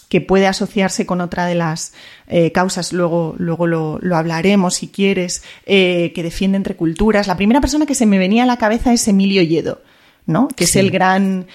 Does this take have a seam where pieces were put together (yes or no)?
no